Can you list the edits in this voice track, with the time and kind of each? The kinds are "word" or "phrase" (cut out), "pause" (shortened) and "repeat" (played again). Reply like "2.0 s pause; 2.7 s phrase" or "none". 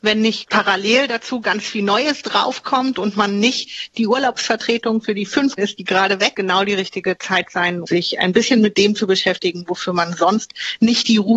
5.6 s word; 6.3 s phrase; 7.8 s word

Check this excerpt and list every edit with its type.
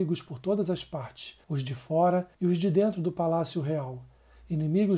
1.4 s pause; 2.3 s pause

